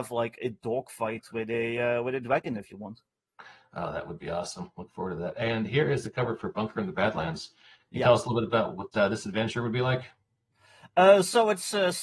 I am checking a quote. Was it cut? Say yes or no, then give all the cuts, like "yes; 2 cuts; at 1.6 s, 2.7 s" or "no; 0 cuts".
no; 0 cuts